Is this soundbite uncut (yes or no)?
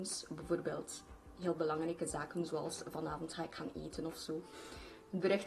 yes